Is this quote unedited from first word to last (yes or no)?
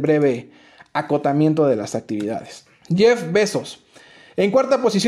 no